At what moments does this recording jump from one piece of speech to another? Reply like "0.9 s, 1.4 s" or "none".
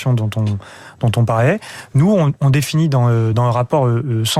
none